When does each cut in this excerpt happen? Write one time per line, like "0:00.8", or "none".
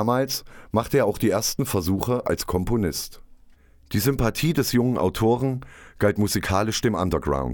none